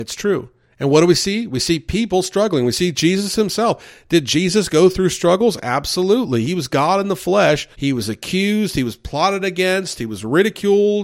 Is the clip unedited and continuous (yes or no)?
no